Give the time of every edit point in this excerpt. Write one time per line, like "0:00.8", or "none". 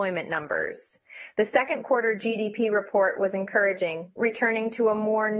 none